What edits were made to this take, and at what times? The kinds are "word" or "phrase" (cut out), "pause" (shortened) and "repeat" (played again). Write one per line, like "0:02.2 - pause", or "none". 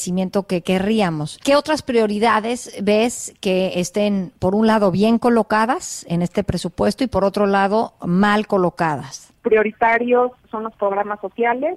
none

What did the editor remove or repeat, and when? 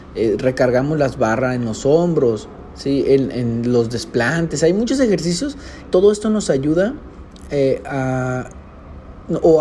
0:05.9 - word

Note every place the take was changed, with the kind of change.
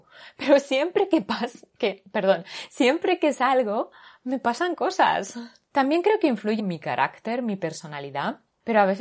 0:06.6 - phrase

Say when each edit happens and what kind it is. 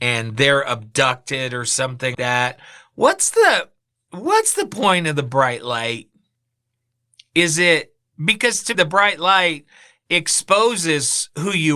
0:02.1 - word
0:08.7 - word

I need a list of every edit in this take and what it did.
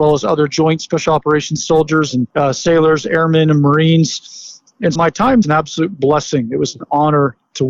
0:02.3 - pause
0:04.9 - word
0:05.4 - phrase

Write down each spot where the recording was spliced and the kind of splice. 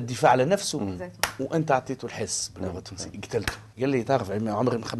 0:03.7 - pause

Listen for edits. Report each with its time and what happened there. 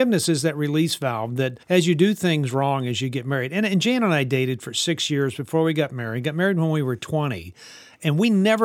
0:01.6 - pause

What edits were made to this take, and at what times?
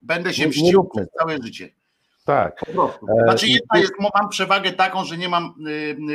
none

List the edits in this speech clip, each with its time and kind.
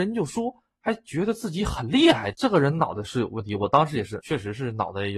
0:02.3 - phrase
0:04.2 - word

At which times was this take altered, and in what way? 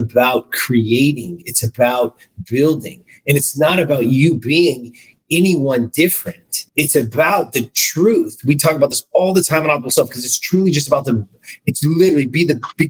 0:06.7 - pause

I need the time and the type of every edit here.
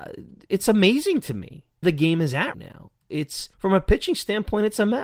0:01.8 - word
0:02.5 - word
0:03.5 - pause

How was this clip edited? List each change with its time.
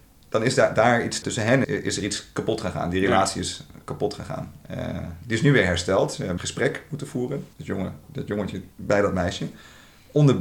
0:01.2 - word
0:01.6 - word
0:06.4 - word
0:07.5 - pause
0:08.0 - word
0:08.7 - pause

